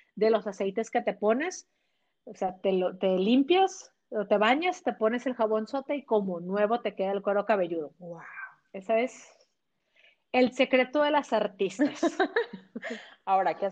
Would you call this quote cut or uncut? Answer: uncut